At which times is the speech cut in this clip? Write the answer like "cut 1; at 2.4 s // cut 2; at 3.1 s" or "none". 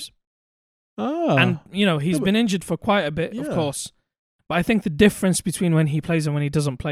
none